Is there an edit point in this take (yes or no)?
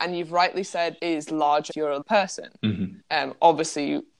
yes